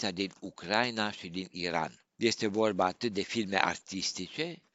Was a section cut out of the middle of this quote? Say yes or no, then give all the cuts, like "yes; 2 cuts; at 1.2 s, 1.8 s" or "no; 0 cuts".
yes; 1 cut; at 2.1 s